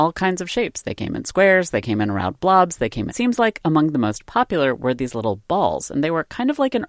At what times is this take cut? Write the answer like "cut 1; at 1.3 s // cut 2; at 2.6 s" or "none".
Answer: cut 1; at 3.1 s